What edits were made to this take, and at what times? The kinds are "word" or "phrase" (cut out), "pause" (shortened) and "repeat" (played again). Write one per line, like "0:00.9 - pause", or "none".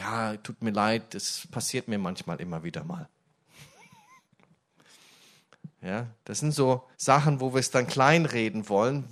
0:06.2 - pause
0:06.9 - pause